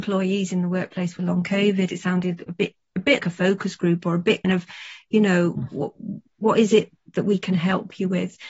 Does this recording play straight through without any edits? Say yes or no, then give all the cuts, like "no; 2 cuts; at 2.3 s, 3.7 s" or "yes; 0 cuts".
no; 3 cuts; at 1.9 s, 3.2 s, 4.4 s